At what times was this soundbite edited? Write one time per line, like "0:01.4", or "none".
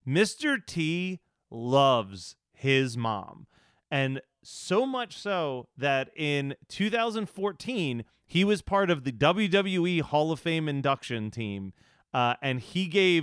none